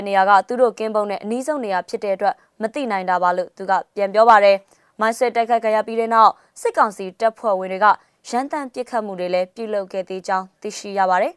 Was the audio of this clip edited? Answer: no; 0 cuts

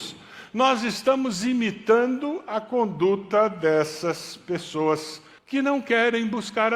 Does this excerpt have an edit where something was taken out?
yes; 1 cut; at 5.4 s

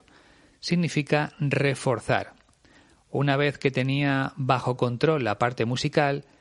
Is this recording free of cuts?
yes; 0 cuts

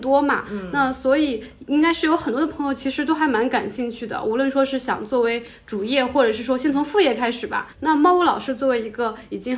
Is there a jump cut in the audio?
yes; 1 cut; at 7.7 s

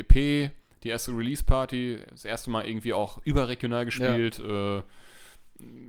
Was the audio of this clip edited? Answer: no; 0 cuts

